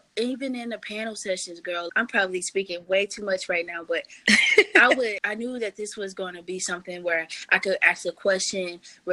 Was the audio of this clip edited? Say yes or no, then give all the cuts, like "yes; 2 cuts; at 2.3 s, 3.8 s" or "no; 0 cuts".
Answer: yes; 1 cut; at 1.9 s